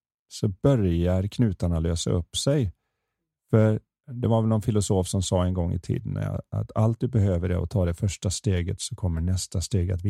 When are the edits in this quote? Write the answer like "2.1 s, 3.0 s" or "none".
none

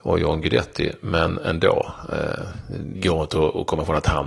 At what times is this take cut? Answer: 2.9 s

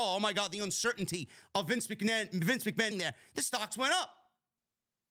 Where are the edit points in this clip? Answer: 2.9 s

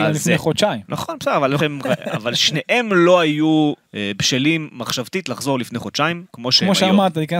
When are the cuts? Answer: 1.6 s, 3.8 s, 6.3 s

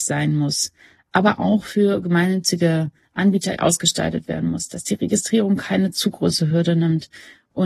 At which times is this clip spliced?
3.6 s

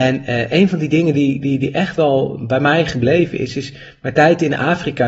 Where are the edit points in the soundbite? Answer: none

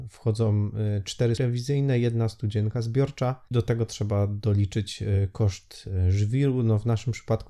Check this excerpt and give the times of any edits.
1.4 s, 3.5 s

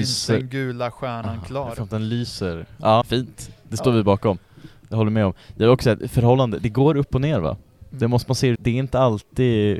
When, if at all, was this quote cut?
3.0 s, 8.5 s

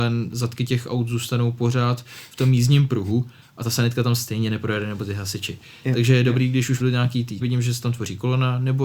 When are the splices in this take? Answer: 6.8 s, 7.4 s

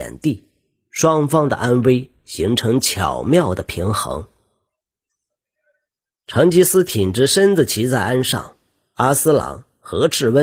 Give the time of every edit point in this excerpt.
none

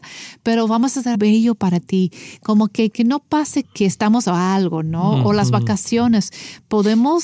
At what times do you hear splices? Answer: 1.1 s, 2.9 s, 3.6 s, 4.2 s

